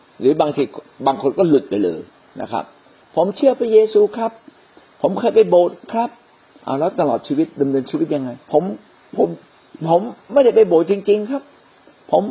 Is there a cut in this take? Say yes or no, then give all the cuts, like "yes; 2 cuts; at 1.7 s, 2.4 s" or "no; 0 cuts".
yes; 1 cut; at 8.4 s